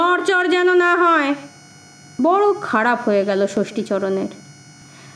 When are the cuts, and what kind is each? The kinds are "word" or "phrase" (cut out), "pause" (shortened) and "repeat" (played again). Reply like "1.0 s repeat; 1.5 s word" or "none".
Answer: 2.2 s word